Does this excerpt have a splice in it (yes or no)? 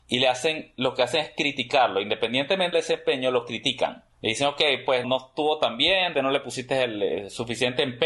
yes